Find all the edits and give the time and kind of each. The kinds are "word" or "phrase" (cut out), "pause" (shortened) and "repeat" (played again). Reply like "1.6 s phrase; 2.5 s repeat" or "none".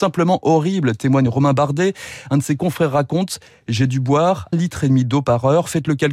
4.5 s word